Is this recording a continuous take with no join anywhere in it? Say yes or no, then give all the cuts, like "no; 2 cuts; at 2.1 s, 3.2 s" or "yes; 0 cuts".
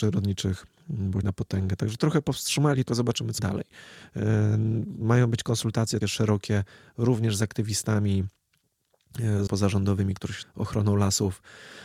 no; 7 cuts; at 1.2 s, 2.0 s, 2.9 s, 3.4 s, 6.0 s, 9.5 s, 10.4 s